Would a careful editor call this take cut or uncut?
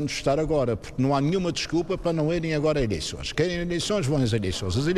uncut